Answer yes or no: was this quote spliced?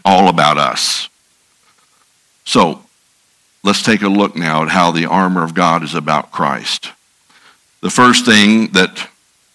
no